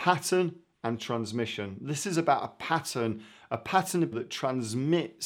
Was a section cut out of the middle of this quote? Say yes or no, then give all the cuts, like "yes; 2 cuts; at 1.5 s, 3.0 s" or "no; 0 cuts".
yes; 1 cut; at 4.1 s